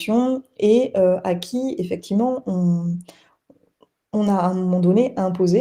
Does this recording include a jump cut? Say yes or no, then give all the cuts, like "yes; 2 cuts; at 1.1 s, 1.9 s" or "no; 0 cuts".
no; 0 cuts